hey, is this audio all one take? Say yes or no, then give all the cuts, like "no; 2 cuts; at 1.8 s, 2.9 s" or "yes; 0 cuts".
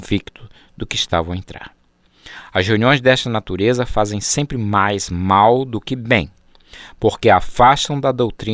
yes; 0 cuts